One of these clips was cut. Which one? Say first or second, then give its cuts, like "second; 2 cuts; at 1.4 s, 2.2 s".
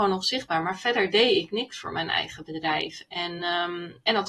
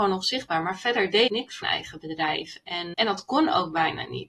second; 3 cuts; at 1.3 s, 1.6 s, 2.9 s